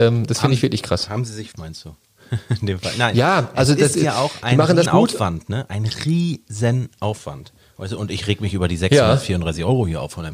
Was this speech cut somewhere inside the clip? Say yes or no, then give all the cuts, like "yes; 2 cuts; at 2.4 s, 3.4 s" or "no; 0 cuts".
yes; 3 cuts; at 1.5 s, 2.0 s, 4.9 s